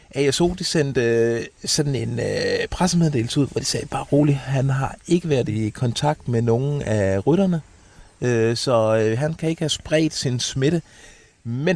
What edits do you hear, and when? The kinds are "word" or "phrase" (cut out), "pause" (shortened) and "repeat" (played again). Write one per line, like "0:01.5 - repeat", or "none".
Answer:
none